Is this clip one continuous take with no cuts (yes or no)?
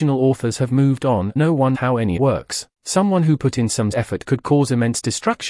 no